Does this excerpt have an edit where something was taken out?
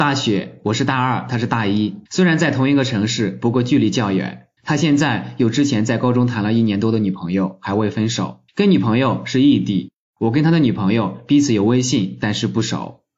yes; 3 cuts; at 2.1 s, 4.6 s, 8.5 s

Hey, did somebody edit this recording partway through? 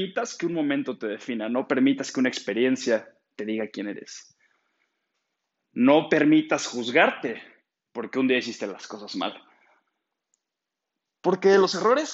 no; 0 cuts

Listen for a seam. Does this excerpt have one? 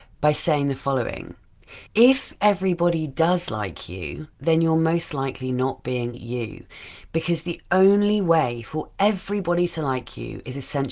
yes; 3 cuts; at 1.9 s, 4.3 s, 6.1 s

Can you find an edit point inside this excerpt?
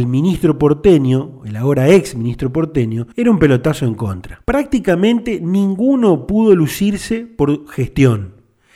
yes; 2 cuts; at 3.1 s, 4.4 s

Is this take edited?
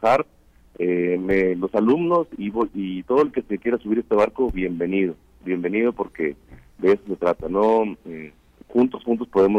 no; 0 cuts

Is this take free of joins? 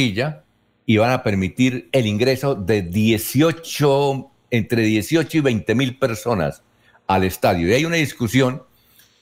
yes; 0 cuts

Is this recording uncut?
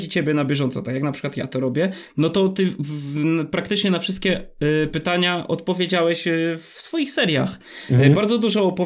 yes; 0 cuts

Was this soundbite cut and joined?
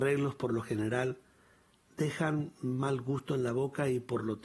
no; 0 cuts

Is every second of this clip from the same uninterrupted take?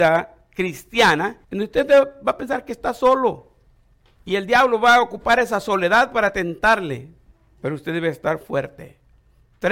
no; 3 cuts; at 1.4 s, 3.7 s, 7.3 s

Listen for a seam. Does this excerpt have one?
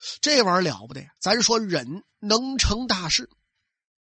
yes; 1 cut; at 1.2 s

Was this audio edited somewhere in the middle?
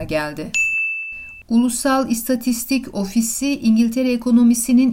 no; 0 cuts

